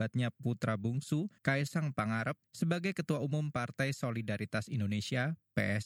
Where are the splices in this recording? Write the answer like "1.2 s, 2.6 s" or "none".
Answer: 1.4 s, 2.4 s

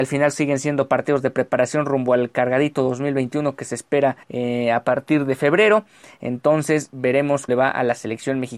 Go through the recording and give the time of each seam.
4.2 s, 7.5 s

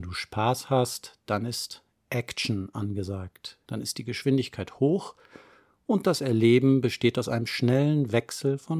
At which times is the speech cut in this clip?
none

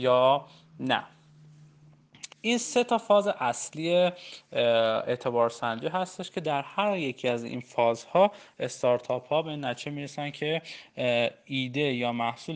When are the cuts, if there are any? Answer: 2.3 s

